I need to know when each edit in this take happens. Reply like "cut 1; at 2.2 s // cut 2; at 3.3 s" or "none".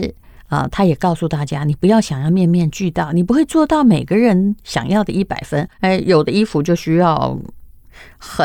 cut 1; at 5.7 s